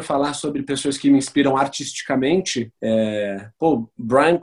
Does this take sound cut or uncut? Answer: cut